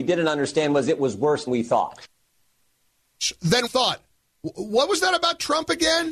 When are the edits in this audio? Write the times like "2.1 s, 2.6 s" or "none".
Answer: 1.5 s, 3.7 s